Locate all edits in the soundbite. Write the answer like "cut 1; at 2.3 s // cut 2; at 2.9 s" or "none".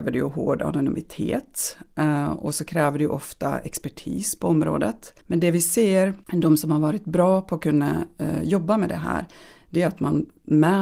cut 1; at 5.2 s // cut 2; at 6.2 s